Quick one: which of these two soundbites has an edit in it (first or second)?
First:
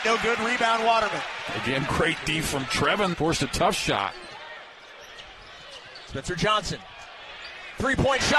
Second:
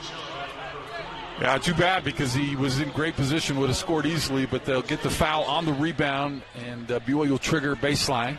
first